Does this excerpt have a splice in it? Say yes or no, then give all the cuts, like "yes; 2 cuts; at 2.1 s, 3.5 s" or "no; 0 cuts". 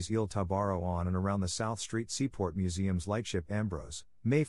no; 0 cuts